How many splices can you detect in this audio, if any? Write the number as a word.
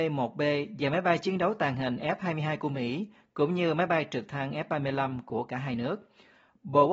zero